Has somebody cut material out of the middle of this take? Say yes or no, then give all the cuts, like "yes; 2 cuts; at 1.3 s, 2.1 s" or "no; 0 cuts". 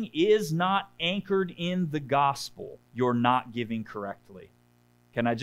yes; 1 cut; at 2.8 s